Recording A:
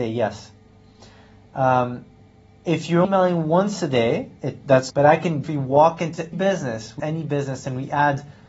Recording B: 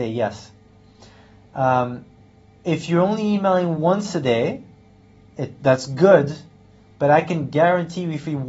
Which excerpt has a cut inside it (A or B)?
A